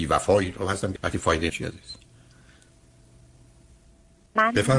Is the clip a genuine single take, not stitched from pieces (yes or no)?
no